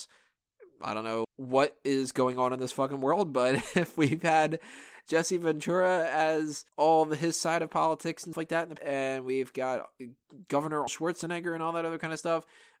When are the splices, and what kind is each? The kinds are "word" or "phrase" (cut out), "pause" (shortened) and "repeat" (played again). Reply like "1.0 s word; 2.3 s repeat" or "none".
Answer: 1.2 s word; 6.7 s pause; 8.3 s word; 8.8 s word; 10.9 s word